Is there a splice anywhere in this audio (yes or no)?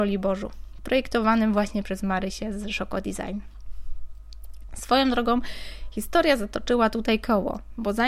no